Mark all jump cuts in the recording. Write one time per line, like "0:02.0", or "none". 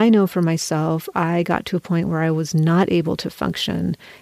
none